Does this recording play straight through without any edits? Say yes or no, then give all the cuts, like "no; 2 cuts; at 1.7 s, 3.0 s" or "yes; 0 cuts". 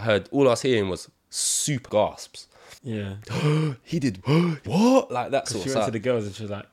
no; 3 cuts; at 1.9 s, 2.8 s, 4.7 s